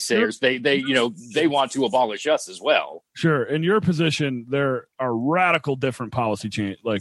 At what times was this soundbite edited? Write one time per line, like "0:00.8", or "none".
0:03.1
0:04.9